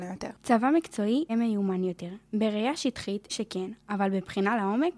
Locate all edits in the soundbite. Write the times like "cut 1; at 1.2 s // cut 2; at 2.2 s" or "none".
cut 1; at 1.3 s // cut 2; at 3.3 s

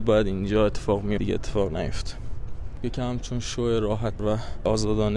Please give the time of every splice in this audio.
cut 1; at 1.2 s // cut 2; at 4.2 s

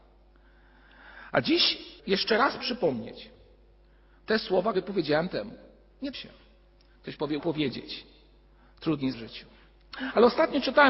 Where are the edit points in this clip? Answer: cut 1; at 2.0 s // cut 2; at 2.6 s // cut 3; at 4.7 s // cut 4; at 5.3 s // cut 5; at 6.1 s // cut 6; at 7.4 s // cut 7; at 9.1 s

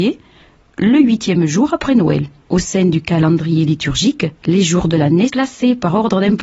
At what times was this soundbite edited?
cut 1; at 4.4 s // cut 2; at 5.3 s

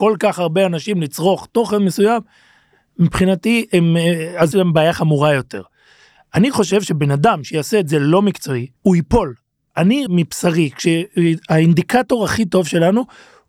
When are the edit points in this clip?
cut 1; at 4.5 s // cut 2; at 8.8 s // cut 3; at 10.1 s

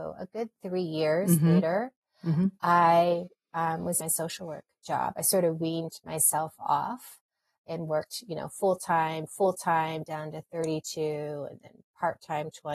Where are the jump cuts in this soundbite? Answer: cut 1; at 4.0 s // cut 2; at 9.3 s

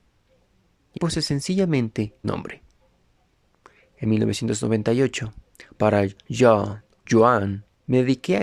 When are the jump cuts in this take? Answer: cut 1; at 1.0 s // cut 2; at 2.2 s // cut 3; at 7.1 s

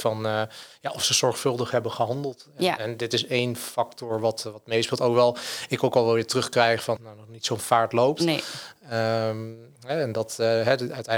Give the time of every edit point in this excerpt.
cut 1; at 7.0 s

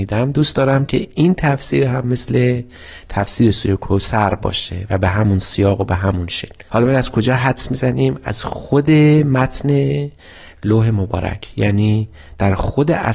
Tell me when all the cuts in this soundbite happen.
none

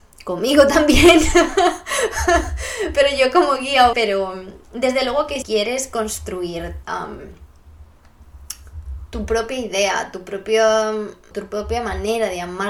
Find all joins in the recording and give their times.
cut 1; at 3.9 s // cut 2; at 5.4 s // cut 3; at 6.8 s // cut 4; at 11.3 s

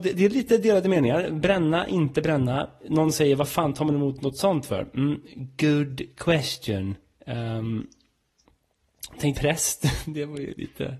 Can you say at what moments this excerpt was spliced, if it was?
cut 1; at 9.3 s

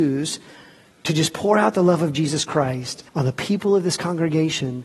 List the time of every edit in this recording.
cut 1; at 3.1 s

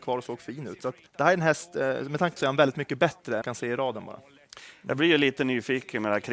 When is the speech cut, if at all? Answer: cut 1; at 1.1 s // cut 2; at 2.4 s // cut 3; at 3.4 s

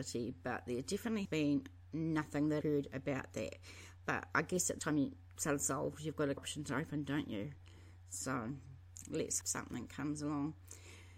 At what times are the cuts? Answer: cut 1; at 1.2 s // cut 2; at 2.6 s // cut 3; at 4.8 s // cut 4; at 6.4 s // cut 5; at 9.4 s

